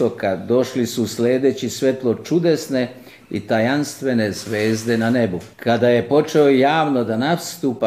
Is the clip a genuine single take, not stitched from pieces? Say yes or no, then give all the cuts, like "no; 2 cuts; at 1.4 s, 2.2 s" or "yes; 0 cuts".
no; 1 cut; at 5.5 s